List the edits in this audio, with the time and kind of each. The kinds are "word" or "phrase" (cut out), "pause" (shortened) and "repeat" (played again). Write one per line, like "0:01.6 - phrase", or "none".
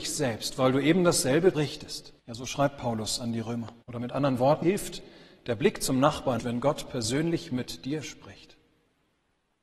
0:01.5 - phrase
0:02.2 - pause
0:03.8 - pause
0:04.6 - word
0:06.4 - word